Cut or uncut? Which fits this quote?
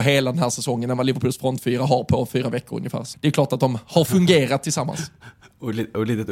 cut